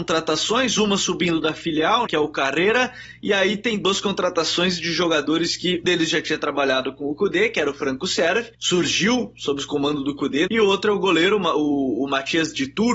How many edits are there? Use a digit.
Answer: 4